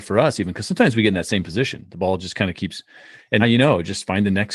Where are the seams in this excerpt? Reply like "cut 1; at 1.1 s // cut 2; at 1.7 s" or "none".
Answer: cut 1; at 3.4 s